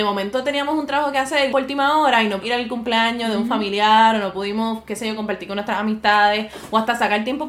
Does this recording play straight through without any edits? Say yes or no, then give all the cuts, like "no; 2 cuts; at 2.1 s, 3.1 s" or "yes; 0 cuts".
no; 2 cuts; at 1.5 s, 2.4 s